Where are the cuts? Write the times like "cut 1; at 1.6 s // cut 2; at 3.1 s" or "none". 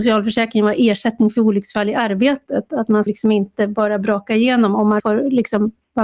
cut 1; at 3.1 s // cut 2; at 5.0 s